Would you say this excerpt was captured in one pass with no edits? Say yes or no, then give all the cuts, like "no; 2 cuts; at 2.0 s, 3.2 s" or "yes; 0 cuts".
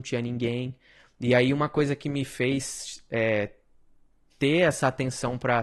yes; 0 cuts